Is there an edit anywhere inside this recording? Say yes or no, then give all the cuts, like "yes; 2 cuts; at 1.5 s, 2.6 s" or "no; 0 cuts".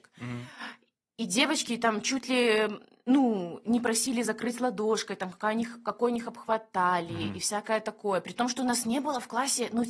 no; 0 cuts